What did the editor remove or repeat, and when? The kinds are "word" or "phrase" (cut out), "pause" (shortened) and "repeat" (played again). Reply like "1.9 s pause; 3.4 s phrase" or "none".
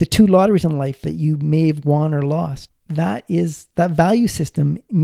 2.7 s word

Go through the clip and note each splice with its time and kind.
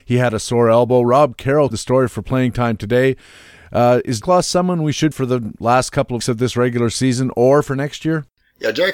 1.7 s word; 4.2 s word; 5.1 s phrase; 6.2 s word

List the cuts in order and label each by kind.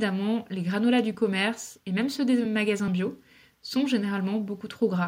none

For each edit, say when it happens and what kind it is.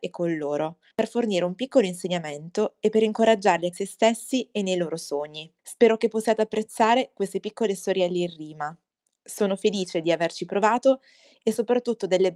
0.9 s pause; 3.7 s phrase; 5.6 s pause; 9.1 s pause

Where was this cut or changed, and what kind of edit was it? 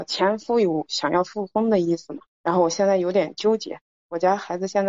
2.3 s pause

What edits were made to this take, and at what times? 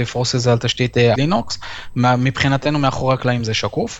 1.1 s phrase

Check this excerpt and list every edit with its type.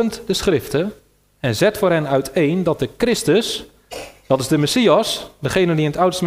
none

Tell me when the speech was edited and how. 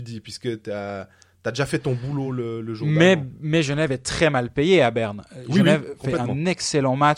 none

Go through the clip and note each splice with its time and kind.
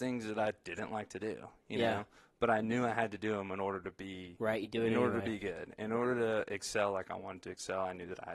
none

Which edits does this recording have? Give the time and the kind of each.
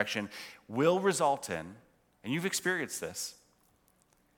none

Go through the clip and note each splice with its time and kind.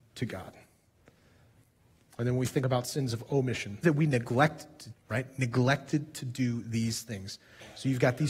3.8 s word; 4.9 s word

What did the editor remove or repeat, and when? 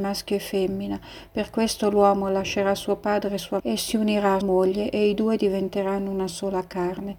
3.6 s word; 4.4 s word

